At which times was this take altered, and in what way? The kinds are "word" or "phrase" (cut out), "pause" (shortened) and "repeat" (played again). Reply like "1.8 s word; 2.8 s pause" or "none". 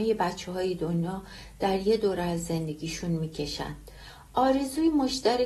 none